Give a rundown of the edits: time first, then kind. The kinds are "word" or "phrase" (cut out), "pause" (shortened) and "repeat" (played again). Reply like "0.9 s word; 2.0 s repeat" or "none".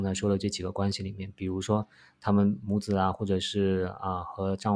none

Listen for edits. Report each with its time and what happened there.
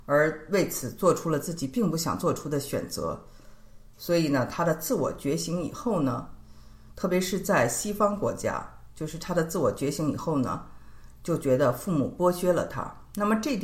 8.9 s pause

